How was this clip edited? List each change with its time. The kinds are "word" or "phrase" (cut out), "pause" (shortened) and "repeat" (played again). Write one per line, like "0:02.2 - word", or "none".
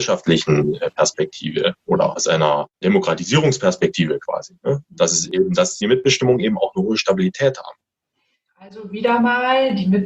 0:02.7 - pause
0:05.8 - phrase